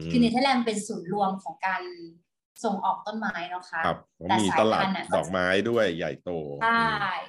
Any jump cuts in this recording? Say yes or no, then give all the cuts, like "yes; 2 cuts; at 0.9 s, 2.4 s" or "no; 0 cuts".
no; 0 cuts